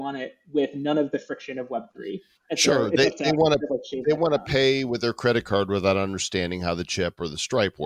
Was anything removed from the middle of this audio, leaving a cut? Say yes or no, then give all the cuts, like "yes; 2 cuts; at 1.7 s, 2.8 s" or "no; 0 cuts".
no; 0 cuts